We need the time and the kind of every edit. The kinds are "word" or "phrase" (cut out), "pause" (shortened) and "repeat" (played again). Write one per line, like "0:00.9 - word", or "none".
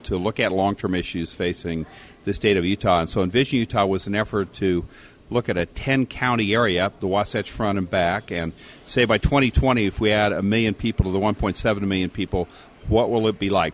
none